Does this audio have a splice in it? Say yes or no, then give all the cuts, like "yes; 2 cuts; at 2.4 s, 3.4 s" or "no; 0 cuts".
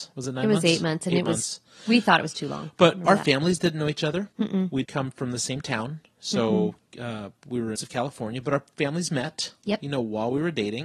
yes; 3 cuts; at 4.3 s, 4.8 s, 7.8 s